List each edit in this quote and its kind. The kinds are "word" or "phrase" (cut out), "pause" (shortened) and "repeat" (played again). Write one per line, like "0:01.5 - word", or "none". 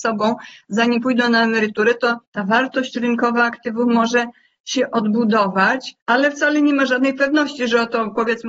0:02.2 - pause
0:06.0 - pause